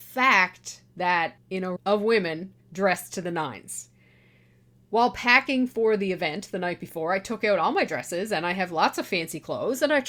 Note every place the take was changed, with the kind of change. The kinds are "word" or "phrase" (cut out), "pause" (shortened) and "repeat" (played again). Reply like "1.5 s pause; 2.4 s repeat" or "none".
1.4 s phrase; 1.8 s word; 2.6 s pause